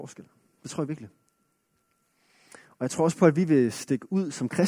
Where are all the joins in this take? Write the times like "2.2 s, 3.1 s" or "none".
2.6 s